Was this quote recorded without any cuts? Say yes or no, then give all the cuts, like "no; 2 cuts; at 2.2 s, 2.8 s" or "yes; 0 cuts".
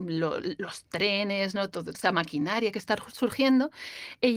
no; 1 cut; at 1.9 s